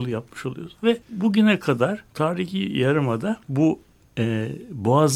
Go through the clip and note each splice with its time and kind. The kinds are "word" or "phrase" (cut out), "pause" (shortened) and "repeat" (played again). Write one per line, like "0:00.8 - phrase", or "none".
0:01.0 - pause
0:02.1 - pause
0:03.4 - pause